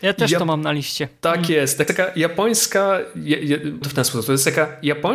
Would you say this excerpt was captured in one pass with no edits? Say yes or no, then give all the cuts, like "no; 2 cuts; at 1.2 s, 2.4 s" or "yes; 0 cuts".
no; 2 cuts; at 1.9 s, 3.8 s